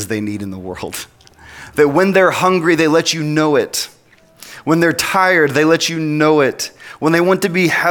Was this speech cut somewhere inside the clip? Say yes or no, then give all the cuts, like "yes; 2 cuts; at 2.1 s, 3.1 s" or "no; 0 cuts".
no; 0 cuts